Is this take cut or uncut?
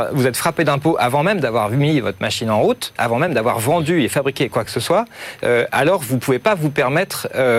uncut